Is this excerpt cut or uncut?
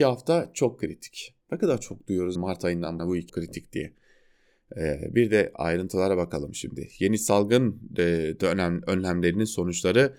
cut